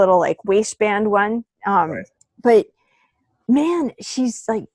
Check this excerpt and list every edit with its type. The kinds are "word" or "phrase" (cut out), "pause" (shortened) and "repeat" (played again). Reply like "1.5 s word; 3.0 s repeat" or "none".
1.5 s pause; 2.2 s pause